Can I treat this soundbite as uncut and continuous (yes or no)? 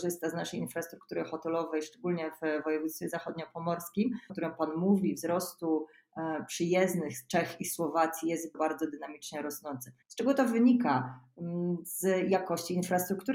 no